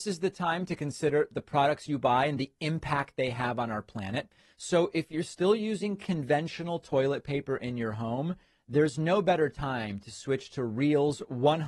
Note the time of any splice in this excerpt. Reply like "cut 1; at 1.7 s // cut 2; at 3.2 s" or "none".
none